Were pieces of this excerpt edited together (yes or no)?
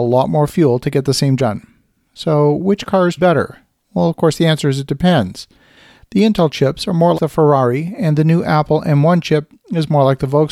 yes